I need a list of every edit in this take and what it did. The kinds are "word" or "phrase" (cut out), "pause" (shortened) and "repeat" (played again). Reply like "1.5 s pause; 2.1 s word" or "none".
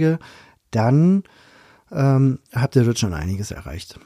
2.5 s pause